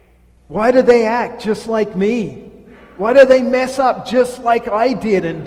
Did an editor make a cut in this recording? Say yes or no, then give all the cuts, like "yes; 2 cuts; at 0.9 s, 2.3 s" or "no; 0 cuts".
no; 0 cuts